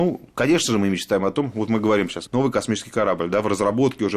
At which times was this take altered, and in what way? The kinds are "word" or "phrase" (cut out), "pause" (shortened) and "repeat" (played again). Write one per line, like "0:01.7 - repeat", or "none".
0:02.3 - word